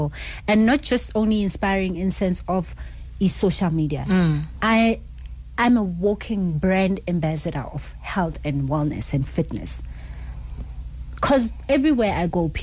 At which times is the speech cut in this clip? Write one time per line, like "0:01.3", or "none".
none